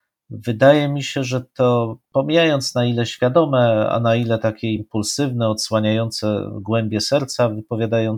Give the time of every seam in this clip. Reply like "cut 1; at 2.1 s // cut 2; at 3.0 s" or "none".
none